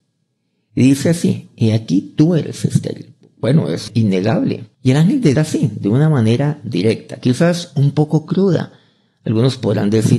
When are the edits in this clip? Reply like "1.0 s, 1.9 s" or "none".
3.9 s, 4.7 s, 5.3 s